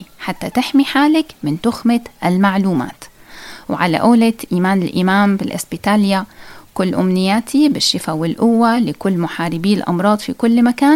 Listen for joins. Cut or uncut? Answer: uncut